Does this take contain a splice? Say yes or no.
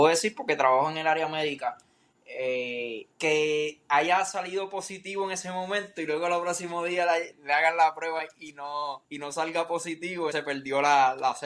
yes